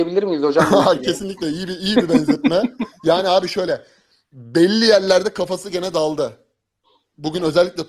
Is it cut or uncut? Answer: uncut